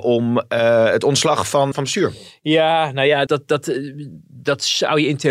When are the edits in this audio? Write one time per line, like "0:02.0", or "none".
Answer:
0:01.7
0:03.3